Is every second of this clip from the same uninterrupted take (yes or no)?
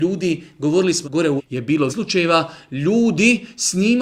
no